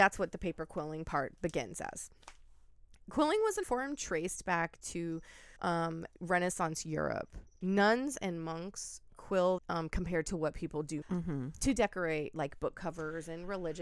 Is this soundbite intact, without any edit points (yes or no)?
no